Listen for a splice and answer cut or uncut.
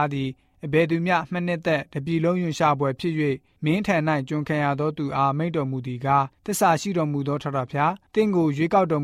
uncut